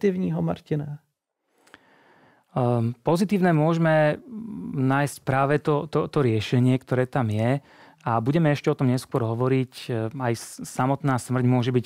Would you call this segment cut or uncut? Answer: uncut